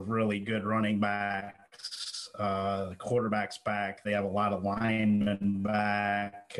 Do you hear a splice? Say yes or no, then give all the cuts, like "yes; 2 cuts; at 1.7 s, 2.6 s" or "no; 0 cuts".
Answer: no; 0 cuts